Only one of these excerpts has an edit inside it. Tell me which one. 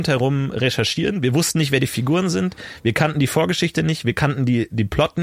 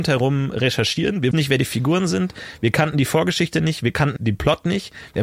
second; 2 cuts; at 1.3 s, 4.2 s

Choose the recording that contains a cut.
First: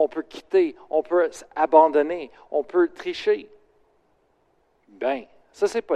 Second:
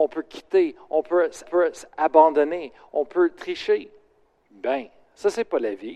second; 2 cuts; at 1.4 s, 4.3 s

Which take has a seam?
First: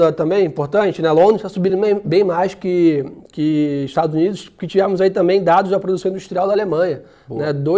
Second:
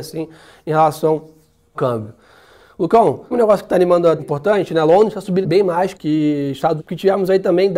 second; 6 cuts; at 1.7 s, 3.3 s, 4.2 s, 5.4 s, 5.9 s, 6.8 s

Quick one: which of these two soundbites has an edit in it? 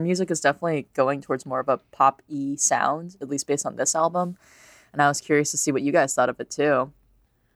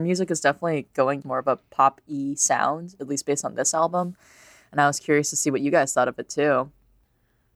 second; 1 cut; at 1.2 s

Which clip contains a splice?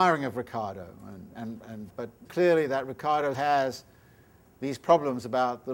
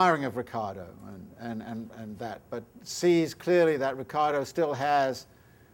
first; 4 cuts; at 1.3 s, 1.9 s, 2.2 s, 3.3 s

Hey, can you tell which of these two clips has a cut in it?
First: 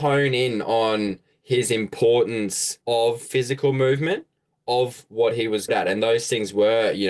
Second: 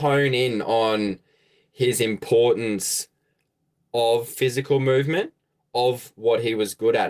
first; 3 cuts; at 1.3 s, 2.8 s, 5.7 s

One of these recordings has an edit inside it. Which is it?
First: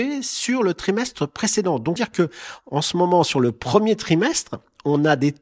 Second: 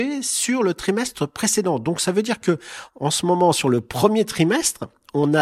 first; 1 cut; at 2.0 s

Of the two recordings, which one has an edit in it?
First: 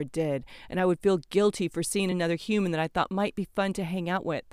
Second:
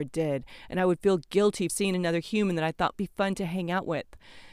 second; 2 cuts; at 1.7 s, 2.9 s

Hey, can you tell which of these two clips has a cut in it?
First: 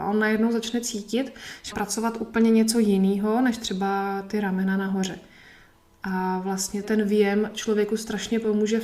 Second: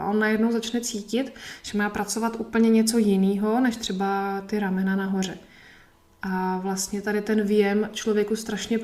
first; 2 cuts; at 1.7 s, 6.8 s

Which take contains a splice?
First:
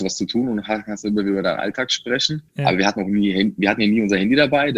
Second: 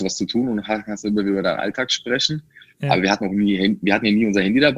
first; 1 cut; at 2.5 s

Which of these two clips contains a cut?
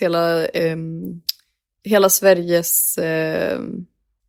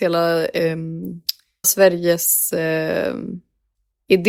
second; 1 cut; at 1.6 s

